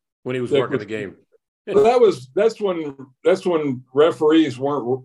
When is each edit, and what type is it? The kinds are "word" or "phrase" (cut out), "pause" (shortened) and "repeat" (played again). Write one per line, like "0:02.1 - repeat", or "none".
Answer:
0:01.7 - word

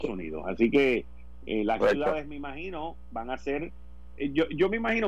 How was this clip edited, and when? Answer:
0:01.8 - word

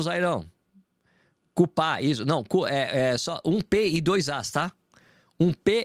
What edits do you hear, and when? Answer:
none

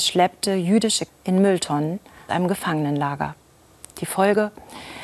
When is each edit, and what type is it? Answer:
0:01.1 - word
0:02.3 - word

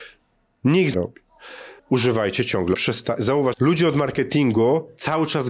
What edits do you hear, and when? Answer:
0:00.9 - phrase
0:01.8 - pause
0:02.7 - phrase
0:03.5 - word

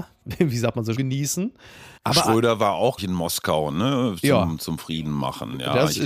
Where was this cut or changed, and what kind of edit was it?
0:00.9 - phrase
0:02.0 - pause
0:03.0 - word

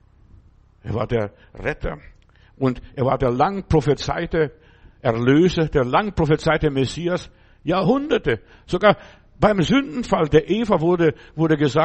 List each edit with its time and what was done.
none

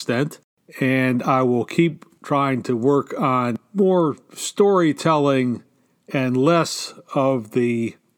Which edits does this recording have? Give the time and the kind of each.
none

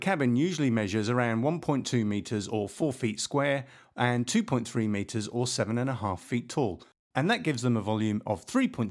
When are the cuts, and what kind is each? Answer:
none

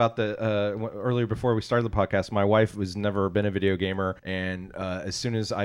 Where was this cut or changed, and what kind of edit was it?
0:04.2 - pause

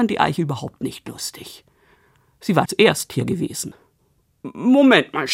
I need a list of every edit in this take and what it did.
0:02.6 - word

